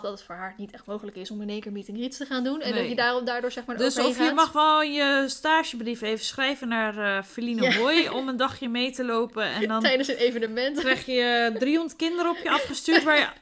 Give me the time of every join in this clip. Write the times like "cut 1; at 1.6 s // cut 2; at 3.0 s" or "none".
none

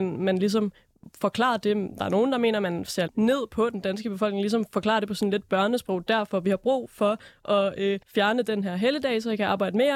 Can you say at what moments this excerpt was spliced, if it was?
cut 1; at 3.1 s // cut 2; at 8.0 s

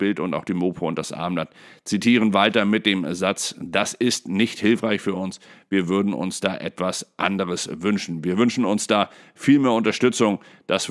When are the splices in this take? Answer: none

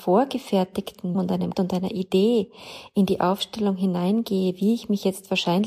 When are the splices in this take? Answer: cut 1; at 1.1 s // cut 2; at 1.5 s

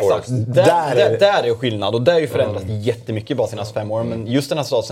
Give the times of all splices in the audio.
none

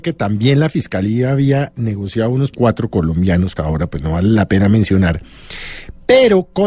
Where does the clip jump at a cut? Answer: cut 1; at 2.5 s // cut 2; at 3.6 s

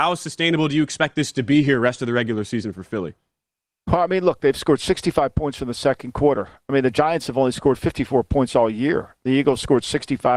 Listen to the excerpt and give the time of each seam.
none

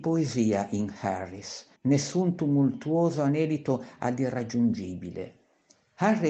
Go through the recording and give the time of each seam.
cut 1; at 1.8 s

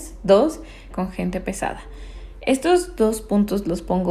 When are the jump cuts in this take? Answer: cut 1; at 0.9 s

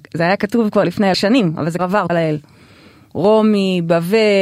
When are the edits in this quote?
cut 1; at 1.1 s // cut 2; at 1.8 s // cut 3; at 2.1 s

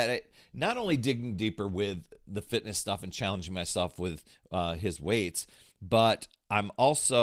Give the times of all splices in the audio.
none

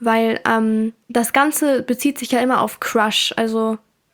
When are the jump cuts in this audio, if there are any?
cut 1; at 1.0 s

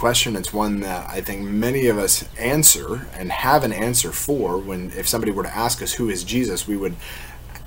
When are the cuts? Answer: cut 1; at 2.3 s

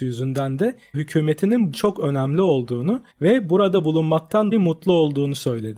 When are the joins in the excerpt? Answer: cut 1; at 0.9 s // cut 2; at 1.7 s // cut 3; at 3.1 s // cut 4; at 4.5 s

